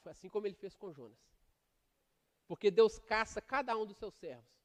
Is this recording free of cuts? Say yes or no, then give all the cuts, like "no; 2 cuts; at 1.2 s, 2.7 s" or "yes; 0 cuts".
yes; 0 cuts